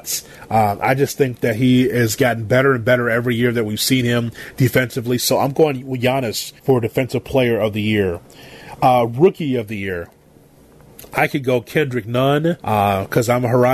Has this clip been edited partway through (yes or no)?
yes